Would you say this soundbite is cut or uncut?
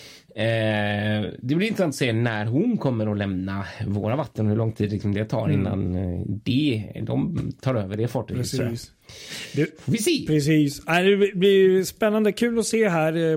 uncut